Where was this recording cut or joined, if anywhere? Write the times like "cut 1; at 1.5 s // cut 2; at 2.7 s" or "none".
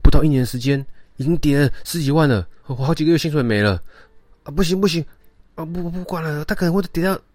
cut 1; at 1.1 s // cut 2; at 2.6 s